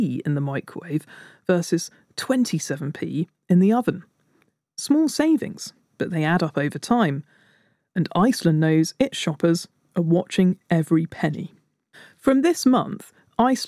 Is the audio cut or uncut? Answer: uncut